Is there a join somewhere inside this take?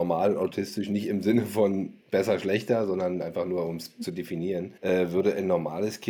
yes; 2 cuts; at 2.0 s, 4.8 s

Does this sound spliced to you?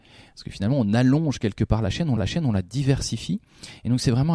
yes; 1 cut; at 2.2 s

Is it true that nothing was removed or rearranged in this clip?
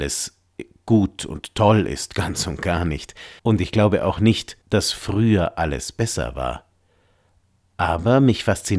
no; 2 cuts; at 3.4 s, 4.6 s

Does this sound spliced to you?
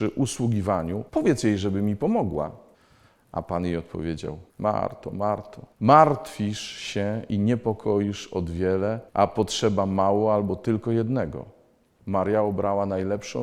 yes; 6 cuts; at 1.1 s, 2.7 s, 4.5 s, 5.7 s, 9.1 s, 11.9 s

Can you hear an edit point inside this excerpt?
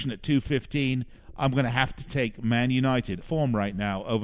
yes; 1 cut; at 3.2 s

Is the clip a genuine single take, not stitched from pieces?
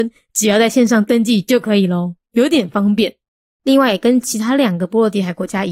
yes; 0 cuts

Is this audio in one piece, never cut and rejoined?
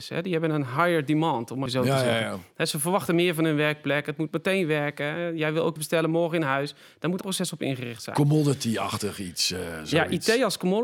no; 3 cuts; at 1.7 s, 5.8 s, 7.2 s

